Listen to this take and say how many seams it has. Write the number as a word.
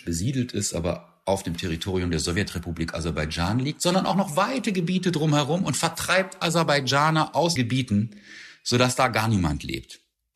two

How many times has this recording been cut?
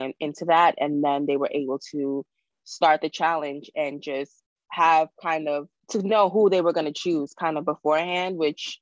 zero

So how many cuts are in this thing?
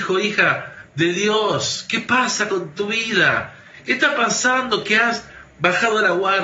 zero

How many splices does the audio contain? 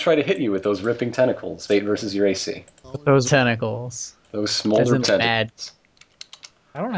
four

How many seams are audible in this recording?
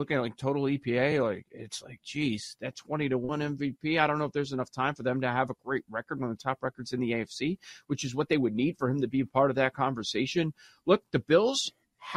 zero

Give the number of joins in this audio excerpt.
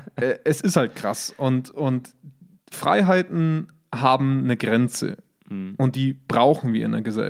zero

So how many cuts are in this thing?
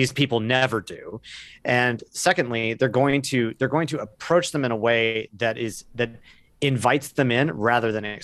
zero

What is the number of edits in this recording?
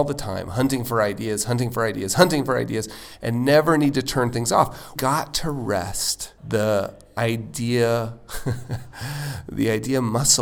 two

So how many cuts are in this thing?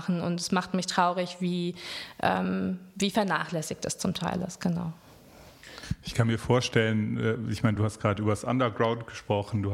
zero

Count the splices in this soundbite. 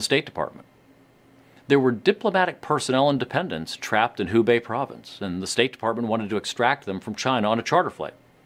zero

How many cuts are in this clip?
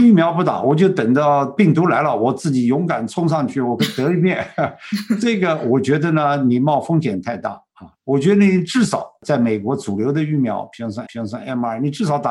two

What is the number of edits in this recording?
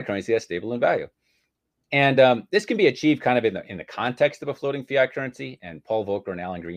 zero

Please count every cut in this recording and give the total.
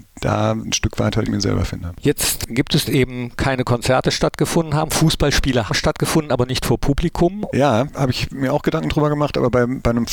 three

